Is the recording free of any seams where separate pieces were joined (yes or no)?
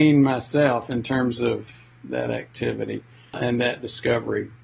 yes